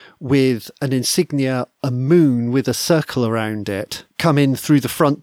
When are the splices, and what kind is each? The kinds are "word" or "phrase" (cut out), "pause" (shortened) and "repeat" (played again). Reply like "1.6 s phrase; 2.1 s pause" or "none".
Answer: 1.8 s word; 4.1 s pause